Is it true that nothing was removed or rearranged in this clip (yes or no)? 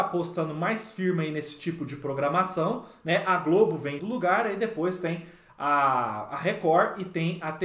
no